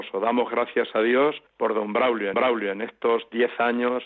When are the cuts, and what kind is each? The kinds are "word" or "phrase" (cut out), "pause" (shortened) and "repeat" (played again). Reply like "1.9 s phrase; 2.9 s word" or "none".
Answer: 1.5 s pause; 2.3 s repeat